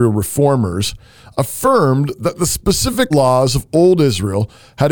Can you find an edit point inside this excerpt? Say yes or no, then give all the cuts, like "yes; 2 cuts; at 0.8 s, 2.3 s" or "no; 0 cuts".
yes; 1 cut; at 3.1 s